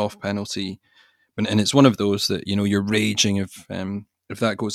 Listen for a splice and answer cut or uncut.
uncut